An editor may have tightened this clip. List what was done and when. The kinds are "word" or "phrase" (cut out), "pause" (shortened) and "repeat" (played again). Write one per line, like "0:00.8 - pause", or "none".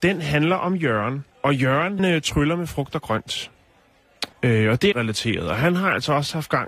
0:01.3 - pause
0:02.0 - word
0:04.3 - pause
0:04.9 - phrase